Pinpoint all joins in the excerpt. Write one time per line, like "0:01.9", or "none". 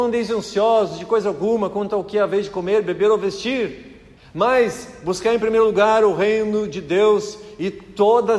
0:04.2